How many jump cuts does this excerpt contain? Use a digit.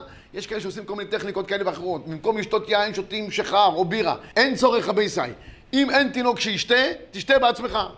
1